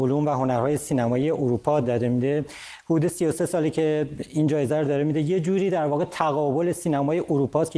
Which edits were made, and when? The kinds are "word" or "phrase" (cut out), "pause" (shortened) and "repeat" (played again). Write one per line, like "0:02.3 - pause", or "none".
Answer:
none